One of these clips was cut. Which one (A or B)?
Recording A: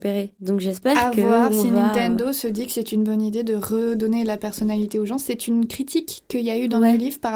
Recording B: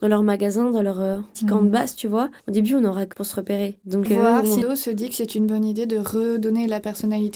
B